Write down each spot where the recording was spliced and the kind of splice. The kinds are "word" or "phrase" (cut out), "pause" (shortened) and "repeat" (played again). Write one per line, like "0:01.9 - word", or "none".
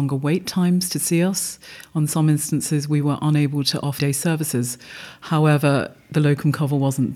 0:04.0 - word